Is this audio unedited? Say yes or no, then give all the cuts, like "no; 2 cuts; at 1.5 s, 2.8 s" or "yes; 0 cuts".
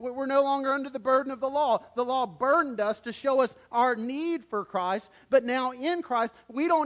yes; 0 cuts